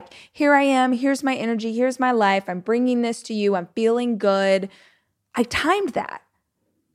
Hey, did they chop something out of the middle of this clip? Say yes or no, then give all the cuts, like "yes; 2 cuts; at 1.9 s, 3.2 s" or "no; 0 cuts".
no; 0 cuts